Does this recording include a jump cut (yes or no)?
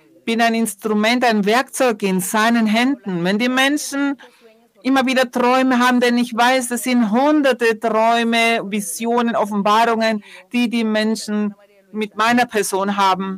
no